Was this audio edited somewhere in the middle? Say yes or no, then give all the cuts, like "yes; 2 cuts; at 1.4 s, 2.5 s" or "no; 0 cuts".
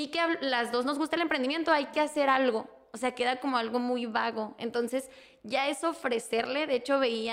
no; 0 cuts